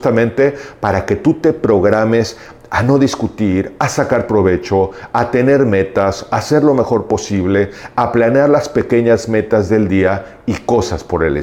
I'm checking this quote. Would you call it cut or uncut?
uncut